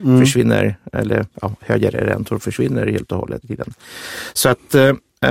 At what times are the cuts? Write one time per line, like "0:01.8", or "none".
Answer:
0:03.4